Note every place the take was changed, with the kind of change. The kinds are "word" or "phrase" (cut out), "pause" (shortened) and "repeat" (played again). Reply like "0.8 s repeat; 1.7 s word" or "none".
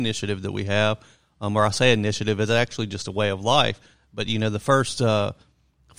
none